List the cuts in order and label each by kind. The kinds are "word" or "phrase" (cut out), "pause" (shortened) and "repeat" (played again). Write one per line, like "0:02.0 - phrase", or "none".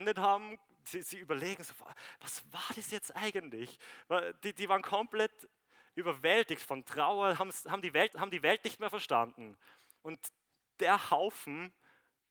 0:08.1 - repeat